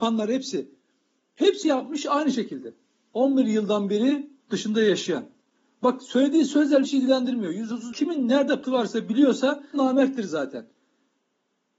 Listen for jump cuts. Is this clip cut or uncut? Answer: cut